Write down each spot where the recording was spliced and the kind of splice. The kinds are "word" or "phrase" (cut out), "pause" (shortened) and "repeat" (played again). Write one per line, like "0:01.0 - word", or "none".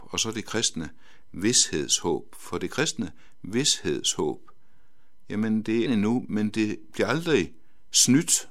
0:05.9 - phrase